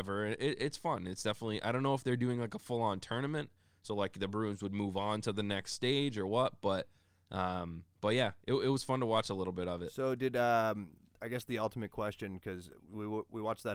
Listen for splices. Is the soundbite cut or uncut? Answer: cut